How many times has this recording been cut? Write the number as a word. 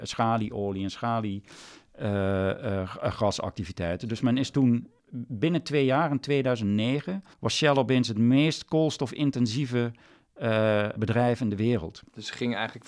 two